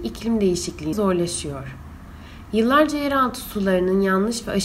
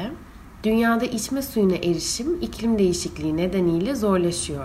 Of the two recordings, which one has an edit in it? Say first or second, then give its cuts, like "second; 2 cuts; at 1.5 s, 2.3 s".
first; 1 cut; at 0.9 s